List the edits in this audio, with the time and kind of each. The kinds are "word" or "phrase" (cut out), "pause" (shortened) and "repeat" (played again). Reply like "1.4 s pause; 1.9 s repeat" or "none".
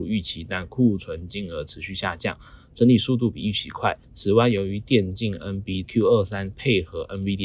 4.0 s pause; 5.8 s phrase